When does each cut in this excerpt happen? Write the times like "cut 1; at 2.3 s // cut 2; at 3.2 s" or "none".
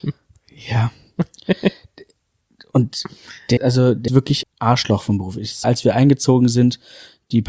cut 1; at 3.6 s // cut 2; at 4.1 s // cut 3; at 4.4 s // cut 4; at 5.6 s